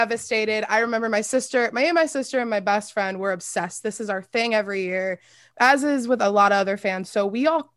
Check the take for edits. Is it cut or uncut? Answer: uncut